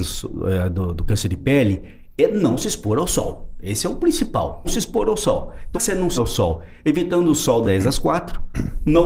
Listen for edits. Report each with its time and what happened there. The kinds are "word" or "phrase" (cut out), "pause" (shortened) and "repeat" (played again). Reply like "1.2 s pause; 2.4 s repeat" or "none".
4.6 s word; 5.7 s word; 6.2 s word; 7.6 s word